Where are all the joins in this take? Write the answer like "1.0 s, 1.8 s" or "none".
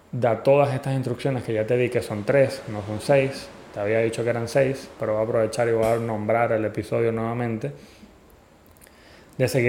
none